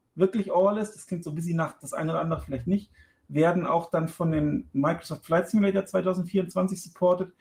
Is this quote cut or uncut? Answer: uncut